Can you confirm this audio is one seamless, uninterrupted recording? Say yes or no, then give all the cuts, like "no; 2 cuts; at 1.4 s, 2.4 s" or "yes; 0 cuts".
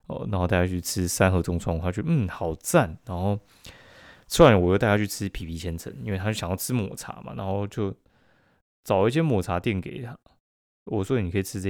yes; 0 cuts